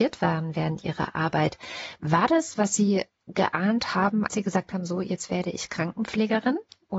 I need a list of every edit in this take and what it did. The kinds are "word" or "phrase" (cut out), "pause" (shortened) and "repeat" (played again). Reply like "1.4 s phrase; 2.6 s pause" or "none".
2.5 s word; 4.3 s word